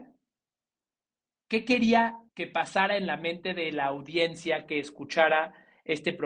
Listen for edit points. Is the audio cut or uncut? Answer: cut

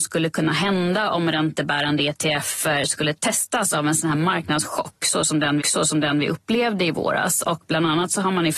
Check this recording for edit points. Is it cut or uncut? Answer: cut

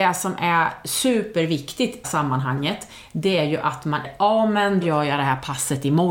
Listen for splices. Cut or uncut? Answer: cut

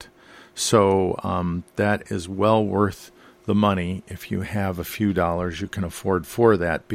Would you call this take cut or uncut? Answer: uncut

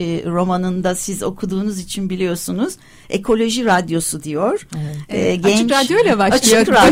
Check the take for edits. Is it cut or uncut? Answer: uncut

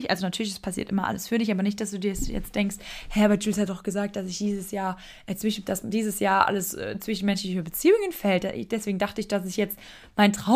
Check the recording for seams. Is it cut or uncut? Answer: uncut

